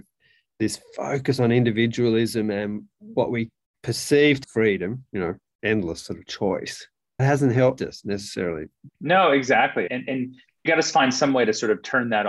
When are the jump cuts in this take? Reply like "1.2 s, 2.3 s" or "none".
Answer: 4.4 s, 7.2 s, 7.8 s, 8.9 s, 9.9 s, 10.7 s